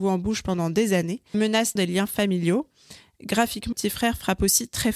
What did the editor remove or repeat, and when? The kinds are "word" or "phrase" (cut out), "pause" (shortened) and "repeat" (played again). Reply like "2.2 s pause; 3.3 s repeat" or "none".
1.3 s word; 1.8 s word; 3.7 s word